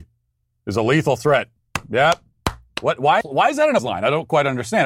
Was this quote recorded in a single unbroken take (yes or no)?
no